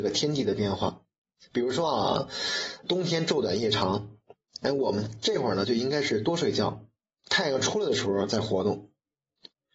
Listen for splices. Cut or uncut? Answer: cut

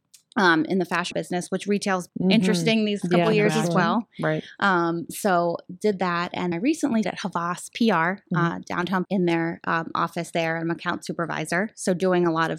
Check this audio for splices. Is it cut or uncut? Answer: cut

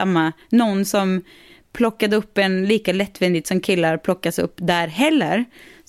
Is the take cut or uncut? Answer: uncut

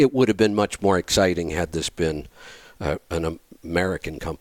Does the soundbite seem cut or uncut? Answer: uncut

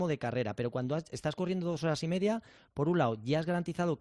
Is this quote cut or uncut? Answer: uncut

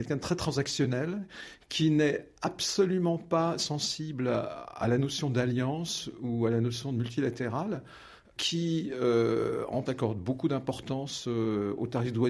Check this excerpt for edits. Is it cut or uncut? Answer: cut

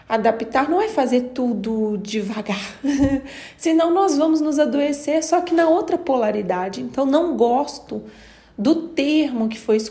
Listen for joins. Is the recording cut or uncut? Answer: uncut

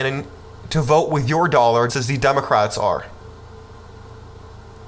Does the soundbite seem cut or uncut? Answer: cut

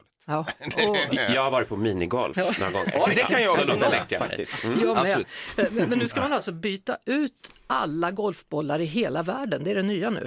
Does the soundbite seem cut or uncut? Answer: uncut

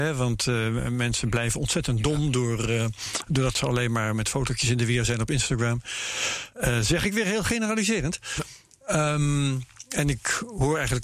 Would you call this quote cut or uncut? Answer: uncut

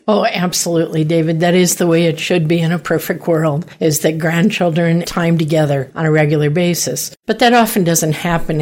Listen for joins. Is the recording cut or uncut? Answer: cut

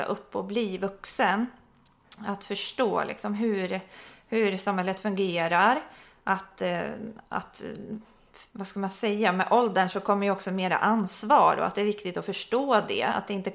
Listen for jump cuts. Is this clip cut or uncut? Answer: cut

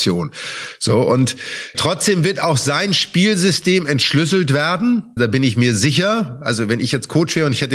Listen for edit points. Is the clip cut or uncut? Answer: cut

